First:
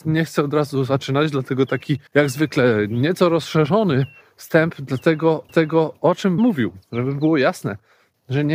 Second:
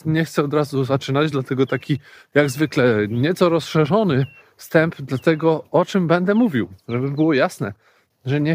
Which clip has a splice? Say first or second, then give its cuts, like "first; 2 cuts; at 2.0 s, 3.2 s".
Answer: first; 3 cuts; at 2.1 s, 5.5 s, 6.4 s